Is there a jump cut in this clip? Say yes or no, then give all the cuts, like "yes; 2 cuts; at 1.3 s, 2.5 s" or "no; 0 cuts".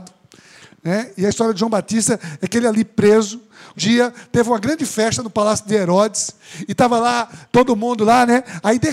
yes; 1 cut; at 3.8 s